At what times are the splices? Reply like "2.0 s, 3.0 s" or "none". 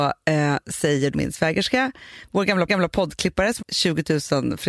1.1 s, 2.7 s, 3.6 s